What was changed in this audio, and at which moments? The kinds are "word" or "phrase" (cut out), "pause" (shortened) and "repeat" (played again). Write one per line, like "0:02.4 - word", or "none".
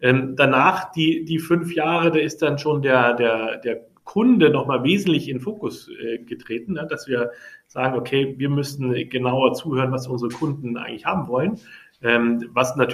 0:04.0 - pause